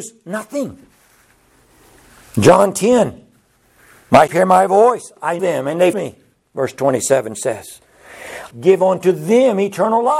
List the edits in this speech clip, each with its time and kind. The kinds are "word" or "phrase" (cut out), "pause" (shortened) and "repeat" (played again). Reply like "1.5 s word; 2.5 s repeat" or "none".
4.3 s word; 5.4 s word; 5.9 s word; 8.5 s word